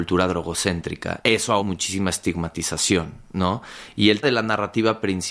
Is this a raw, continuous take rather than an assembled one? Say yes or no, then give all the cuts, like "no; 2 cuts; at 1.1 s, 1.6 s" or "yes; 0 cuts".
no; 2 cuts; at 1.6 s, 4.2 s